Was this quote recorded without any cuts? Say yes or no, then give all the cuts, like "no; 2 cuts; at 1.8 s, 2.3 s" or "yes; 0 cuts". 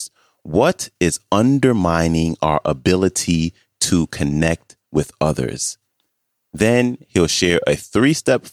yes; 0 cuts